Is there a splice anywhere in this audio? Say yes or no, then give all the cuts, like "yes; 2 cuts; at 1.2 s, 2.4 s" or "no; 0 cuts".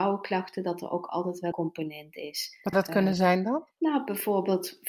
yes; 2 cuts; at 1.5 s, 2.7 s